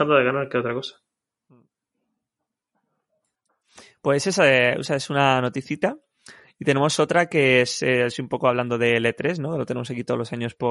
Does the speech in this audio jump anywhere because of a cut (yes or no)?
no